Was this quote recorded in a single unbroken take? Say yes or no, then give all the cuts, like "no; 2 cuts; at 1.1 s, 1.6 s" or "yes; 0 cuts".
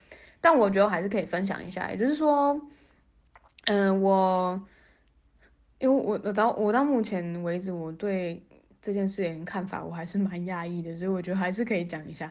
yes; 0 cuts